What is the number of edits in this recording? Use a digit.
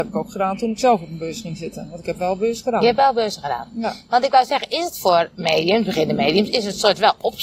0